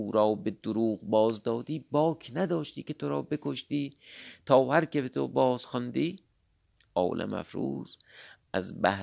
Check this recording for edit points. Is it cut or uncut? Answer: uncut